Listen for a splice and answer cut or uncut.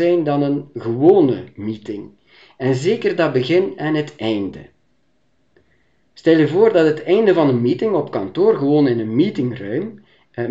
uncut